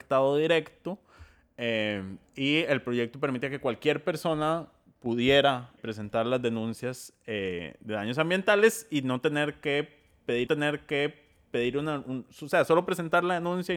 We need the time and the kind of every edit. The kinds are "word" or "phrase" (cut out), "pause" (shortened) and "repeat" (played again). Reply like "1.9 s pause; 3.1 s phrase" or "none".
2.3 s pause; 5.8 s word; 10.5 s repeat